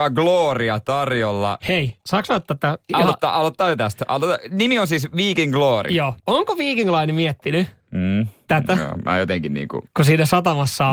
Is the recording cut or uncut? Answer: cut